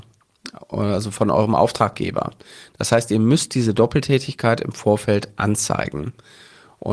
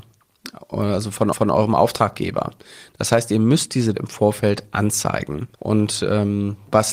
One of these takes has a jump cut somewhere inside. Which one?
second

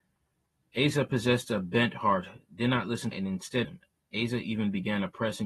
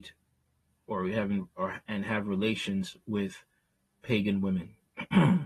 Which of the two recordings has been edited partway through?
first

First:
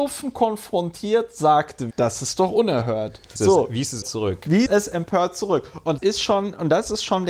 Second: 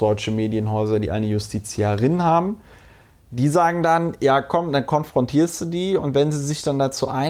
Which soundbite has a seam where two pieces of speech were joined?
first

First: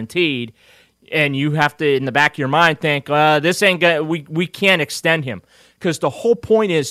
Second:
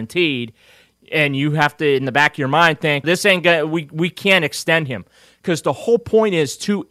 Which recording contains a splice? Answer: second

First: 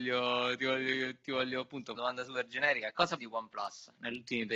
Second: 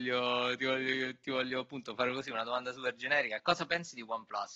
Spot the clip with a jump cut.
first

